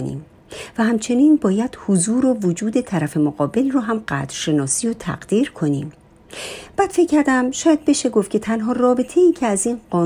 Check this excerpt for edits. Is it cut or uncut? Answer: uncut